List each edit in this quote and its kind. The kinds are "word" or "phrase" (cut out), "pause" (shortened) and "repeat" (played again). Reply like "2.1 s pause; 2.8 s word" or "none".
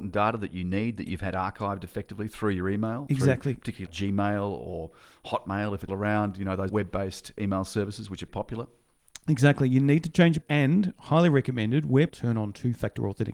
3.9 s word; 5.9 s word; 6.7 s word; 8.3 s word; 10.4 s word; 12.1 s word